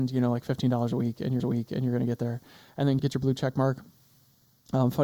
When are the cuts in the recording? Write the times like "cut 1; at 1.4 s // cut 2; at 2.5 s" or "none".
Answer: cut 1; at 1.4 s // cut 2; at 3.0 s